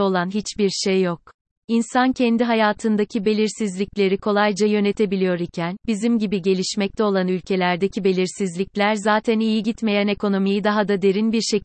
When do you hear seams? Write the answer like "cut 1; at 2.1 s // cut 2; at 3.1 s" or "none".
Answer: cut 1; at 1.5 s